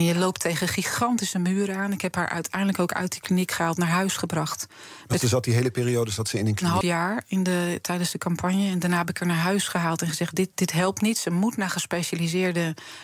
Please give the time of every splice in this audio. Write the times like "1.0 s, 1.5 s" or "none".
6.8 s, 10.5 s

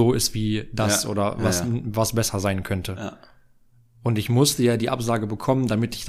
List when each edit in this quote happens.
none

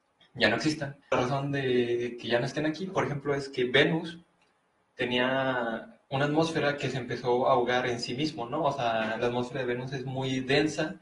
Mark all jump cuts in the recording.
1.0 s, 6.0 s

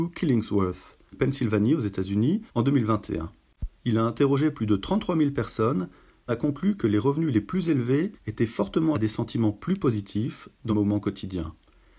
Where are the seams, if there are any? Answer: 1.1 s, 2.5 s, 3.8 s, 6.3 s, 8.2 s, 8.9 s, 10.7 s

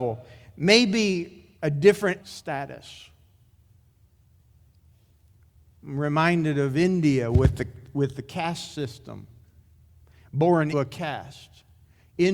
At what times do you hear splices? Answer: 1.6 s, 2.2 s, 10.7 s

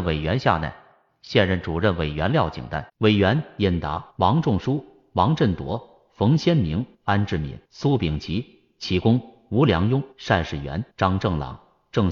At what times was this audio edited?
2.9 s, 4.1 s, 6.9 s, 7.6 s, 10.1 s, 10.9 s

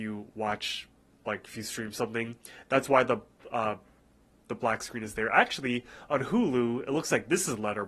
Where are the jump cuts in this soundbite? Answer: none

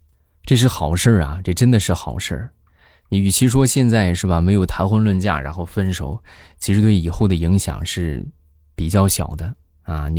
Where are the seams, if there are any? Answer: none

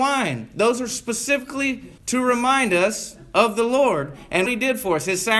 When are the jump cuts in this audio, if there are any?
2.0 s, 4.5 s

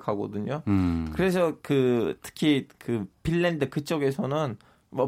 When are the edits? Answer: none

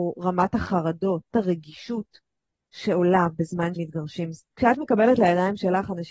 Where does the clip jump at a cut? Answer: 1.3 s, 3.8 s, 4.4 s

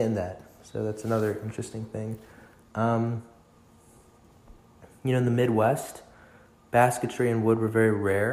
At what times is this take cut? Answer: none

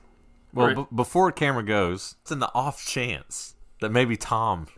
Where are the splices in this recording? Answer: 2.3 s

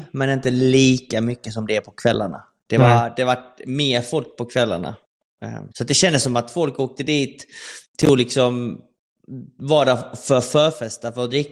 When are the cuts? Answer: 5.7 s, 7.9 s

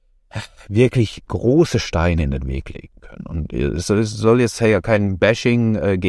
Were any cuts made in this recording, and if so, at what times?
none

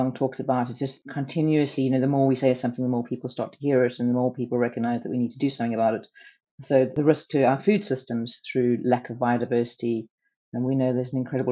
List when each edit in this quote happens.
none

